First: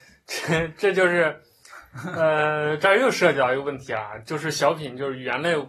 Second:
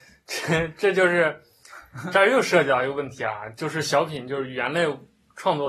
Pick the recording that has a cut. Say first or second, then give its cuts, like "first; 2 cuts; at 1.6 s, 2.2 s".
second; 1 cut; at 2.1 s